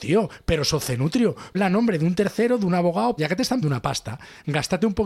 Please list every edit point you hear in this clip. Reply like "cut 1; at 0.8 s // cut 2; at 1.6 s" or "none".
cut 1; at 1.5 s // cut 2; at 3.2 s // cut 3; at 3.6 s